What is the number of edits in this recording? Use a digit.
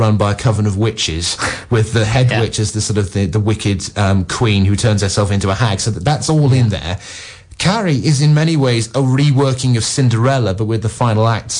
0